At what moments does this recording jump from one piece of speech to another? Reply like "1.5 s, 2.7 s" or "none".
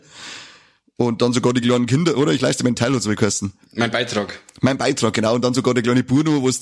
none